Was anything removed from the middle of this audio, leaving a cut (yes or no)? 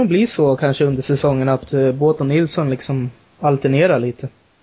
no